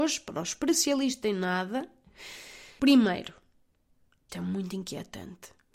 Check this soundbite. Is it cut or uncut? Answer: cut